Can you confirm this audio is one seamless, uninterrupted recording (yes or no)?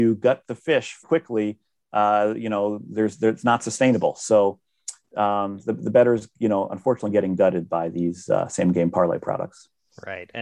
no